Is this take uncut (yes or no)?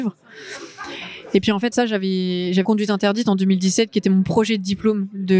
no